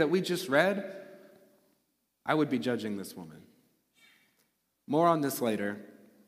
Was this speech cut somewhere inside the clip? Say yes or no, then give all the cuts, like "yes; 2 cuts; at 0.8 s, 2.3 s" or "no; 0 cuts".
no; 0 cuts